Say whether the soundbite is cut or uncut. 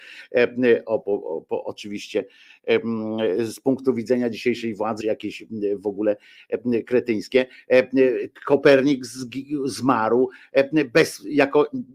cut